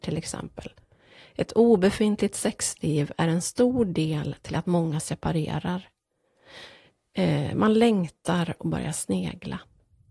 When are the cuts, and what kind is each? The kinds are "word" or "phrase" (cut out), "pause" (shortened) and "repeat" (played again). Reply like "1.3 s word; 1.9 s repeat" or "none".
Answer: none